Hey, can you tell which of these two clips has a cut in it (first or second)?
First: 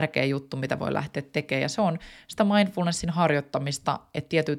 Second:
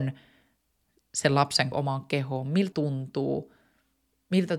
second